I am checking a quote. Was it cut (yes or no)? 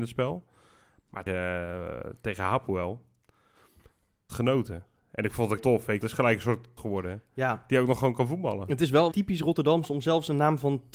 yes